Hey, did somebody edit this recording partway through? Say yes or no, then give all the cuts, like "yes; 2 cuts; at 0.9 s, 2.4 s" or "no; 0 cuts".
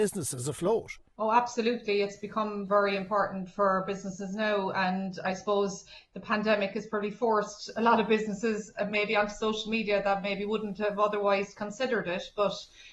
yes; 1 cut; at 2.7 s